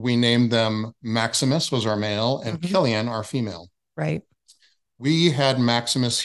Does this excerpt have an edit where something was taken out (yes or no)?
no